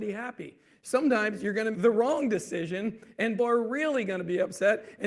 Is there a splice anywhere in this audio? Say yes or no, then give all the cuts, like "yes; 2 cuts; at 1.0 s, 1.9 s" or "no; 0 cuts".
yes; 2 cuts; at 1.7 s, 3.4 s